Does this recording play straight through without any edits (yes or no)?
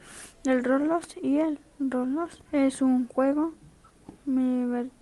yes